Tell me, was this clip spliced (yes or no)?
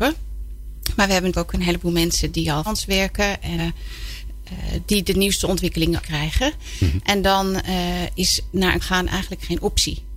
yes